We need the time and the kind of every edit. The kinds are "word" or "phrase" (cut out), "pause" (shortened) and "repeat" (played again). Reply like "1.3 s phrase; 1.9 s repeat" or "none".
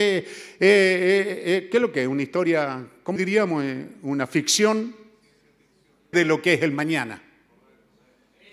3.2 s word; 6.1 s word